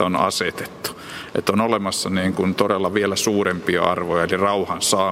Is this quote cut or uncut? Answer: uncut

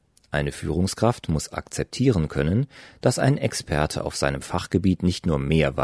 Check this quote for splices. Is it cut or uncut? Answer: uncut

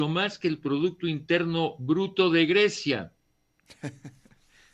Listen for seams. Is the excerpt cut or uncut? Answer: uncut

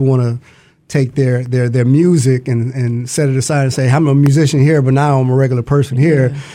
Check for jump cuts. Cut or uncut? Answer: uncut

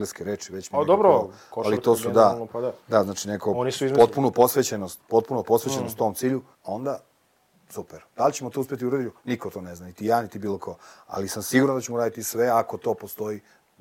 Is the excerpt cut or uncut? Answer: cut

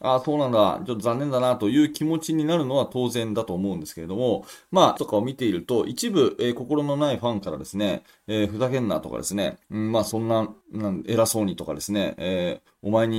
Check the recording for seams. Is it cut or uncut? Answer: cut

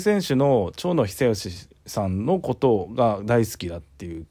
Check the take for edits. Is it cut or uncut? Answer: cut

